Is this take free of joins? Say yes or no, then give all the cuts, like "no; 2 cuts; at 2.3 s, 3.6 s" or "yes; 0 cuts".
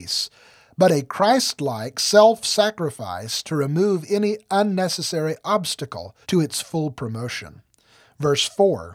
no; 1 cut; at 6.2 s